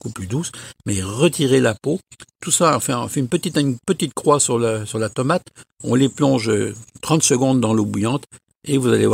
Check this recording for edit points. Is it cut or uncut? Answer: uncut